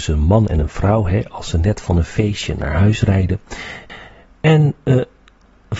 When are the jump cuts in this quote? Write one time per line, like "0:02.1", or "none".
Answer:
none